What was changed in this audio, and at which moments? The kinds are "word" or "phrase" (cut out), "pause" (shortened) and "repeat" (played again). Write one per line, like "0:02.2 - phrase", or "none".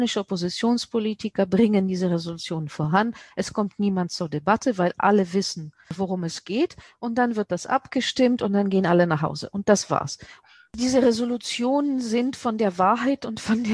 none